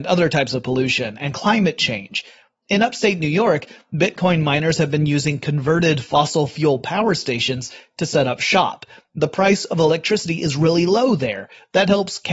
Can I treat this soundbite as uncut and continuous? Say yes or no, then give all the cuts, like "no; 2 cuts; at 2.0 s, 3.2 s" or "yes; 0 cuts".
yes; 0 cuts